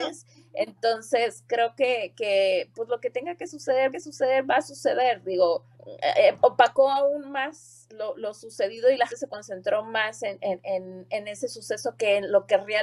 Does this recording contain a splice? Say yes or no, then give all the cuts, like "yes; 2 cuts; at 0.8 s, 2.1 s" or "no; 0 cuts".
yes; 3 cuts; at 3.9 s, 5.7 s, 9.1 s